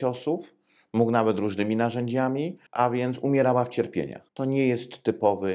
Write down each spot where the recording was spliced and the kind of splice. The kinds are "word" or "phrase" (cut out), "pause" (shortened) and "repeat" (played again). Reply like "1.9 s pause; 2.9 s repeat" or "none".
2.7 s pause; 4.3 s pause